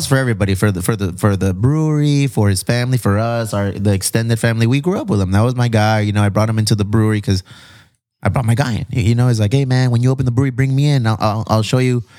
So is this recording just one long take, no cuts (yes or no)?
yes